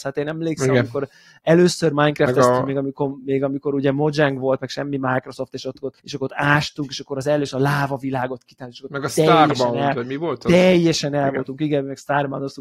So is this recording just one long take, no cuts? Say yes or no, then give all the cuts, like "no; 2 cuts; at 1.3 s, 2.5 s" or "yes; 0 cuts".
no; 1 cut; at 6.0 s